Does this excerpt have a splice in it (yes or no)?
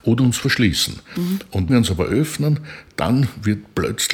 yes